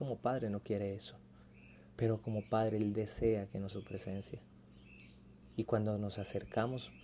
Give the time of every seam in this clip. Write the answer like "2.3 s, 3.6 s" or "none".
1.9 s, 3.7 s

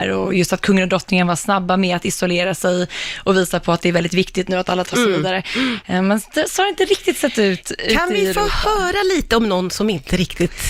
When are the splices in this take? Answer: 4.9 s

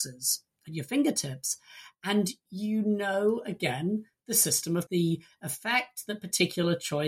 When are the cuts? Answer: 4.9 s

